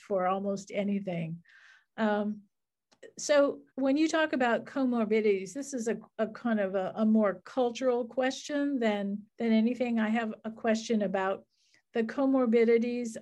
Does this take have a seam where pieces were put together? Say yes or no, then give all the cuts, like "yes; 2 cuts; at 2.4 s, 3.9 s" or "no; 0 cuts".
yes; 2 cuts; at 3.7 s, 9.3 s